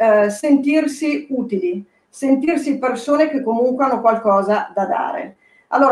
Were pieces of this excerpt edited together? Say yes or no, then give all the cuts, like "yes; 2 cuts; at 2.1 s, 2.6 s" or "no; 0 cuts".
no; 0 cuts